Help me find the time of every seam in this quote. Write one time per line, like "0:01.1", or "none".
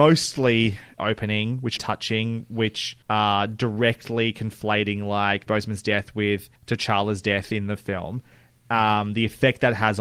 0:01.0
0:01.8
0:03.0
0:05.5
0:06.6